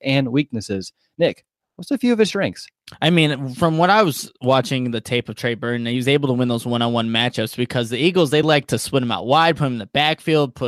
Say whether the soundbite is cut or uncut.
uncut